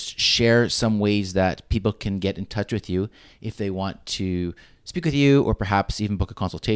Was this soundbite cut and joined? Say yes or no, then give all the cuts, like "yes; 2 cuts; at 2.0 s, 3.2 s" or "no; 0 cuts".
no; 0 cuts